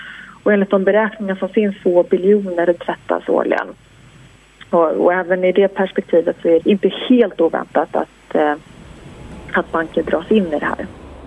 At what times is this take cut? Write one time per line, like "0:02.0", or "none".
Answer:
0:01.8
0:02.8
0:06.6